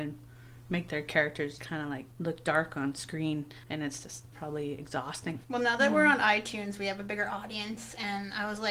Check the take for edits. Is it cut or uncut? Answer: cut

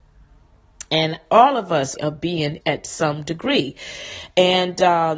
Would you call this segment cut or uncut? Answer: cut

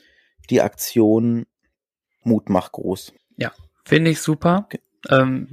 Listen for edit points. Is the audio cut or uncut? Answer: cut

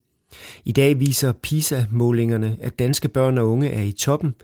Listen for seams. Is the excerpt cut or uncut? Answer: uncut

